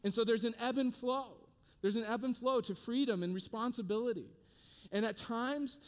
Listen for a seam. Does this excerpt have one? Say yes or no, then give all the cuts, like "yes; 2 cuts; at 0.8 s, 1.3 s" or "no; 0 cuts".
no; 0 cuts